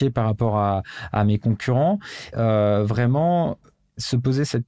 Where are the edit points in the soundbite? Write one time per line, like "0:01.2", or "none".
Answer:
0:02.3

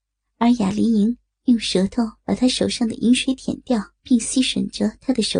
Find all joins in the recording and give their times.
0:04.0

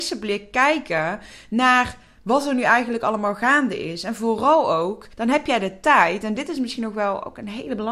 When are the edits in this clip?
0:05.1

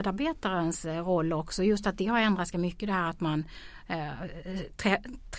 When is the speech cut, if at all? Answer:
0:02.5

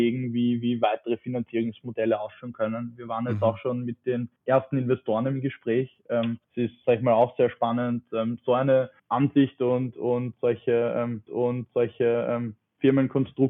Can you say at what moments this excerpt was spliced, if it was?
0:04.4
0:06.4
0:06.8
0:09.0
0:11.3

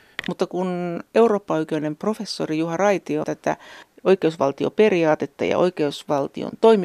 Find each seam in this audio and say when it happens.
0:03.2

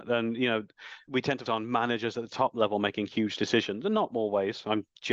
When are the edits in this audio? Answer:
0:01.1
0:01.5

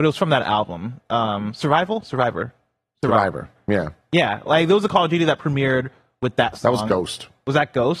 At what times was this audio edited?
0:03.6

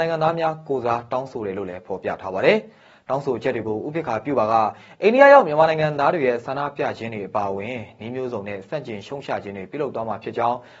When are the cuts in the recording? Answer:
none

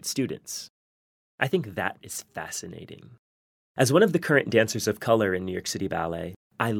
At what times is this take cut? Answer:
0:02.0

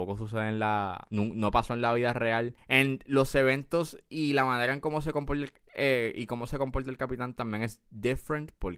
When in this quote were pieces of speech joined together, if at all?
0:02.6

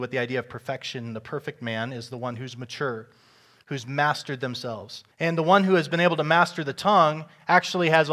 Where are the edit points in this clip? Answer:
0:05.1

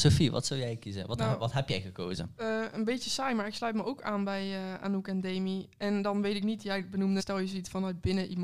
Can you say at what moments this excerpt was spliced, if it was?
0:07.2

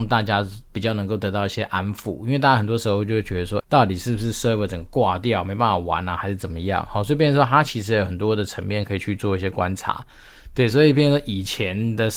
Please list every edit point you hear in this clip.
0:03.6

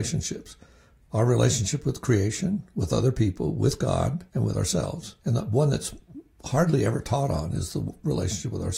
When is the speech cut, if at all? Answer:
0:04.3
0:05.2

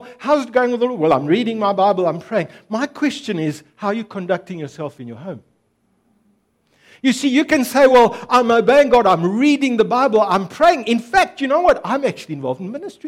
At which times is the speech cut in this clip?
none

